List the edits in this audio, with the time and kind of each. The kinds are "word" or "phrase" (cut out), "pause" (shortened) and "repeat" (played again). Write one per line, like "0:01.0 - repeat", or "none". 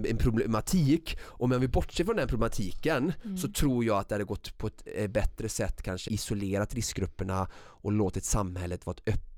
0:06.1 - word